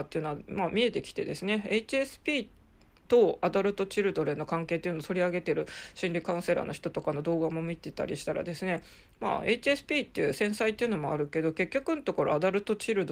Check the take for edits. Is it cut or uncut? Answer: uncut